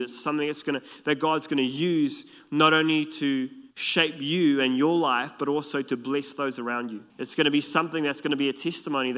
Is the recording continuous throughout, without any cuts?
no; 2 cuts; at 3.7 s, 7.1 s

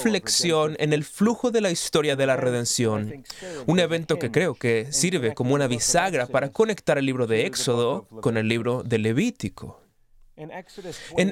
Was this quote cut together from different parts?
no; 0 cuts

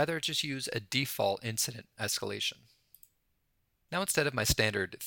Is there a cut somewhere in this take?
no; 0 cuts

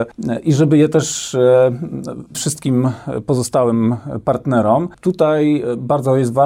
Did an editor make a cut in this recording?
yes; 1 cut; at 2.3 s

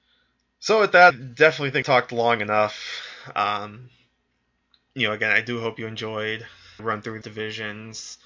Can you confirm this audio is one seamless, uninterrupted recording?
no; 4 cuts; at 1.1 s, 1.8 s, 6.8 s, 7.2 s

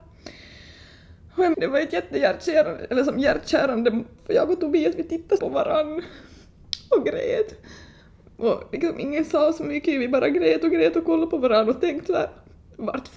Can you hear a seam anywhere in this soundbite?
yes; 3 cuts; at 1.5 s, 4.2 s, 5.4 s

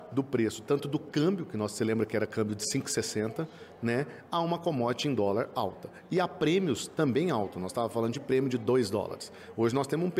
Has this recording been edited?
no; 0 cuts

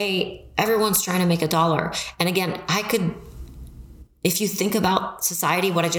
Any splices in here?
no; 0 cuts

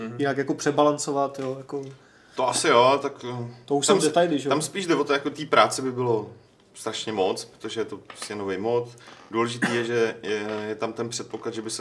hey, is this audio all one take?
yes; 0 cuts

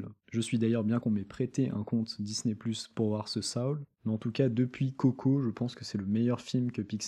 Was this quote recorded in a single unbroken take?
no; 1 cut; at 1.0 s

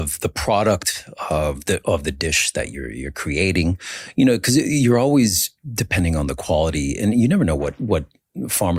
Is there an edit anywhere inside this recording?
no; 0 cuts

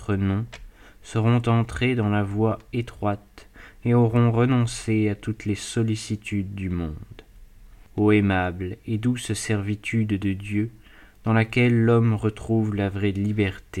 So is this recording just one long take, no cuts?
yes; 0 cuts

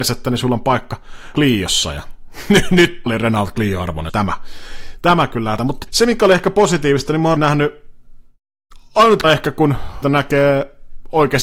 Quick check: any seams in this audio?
yes; 8 cuts; at 1.3 s, 3.1 s, 4.1 s, 5.6 s, 5.9 s, 7.4 s, 9.2 s, 10.0 s

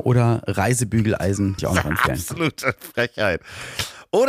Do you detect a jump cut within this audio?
yes; 1 cut; at 1.6 s

